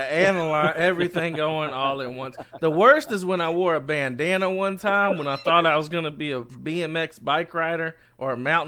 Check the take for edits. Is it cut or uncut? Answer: uncut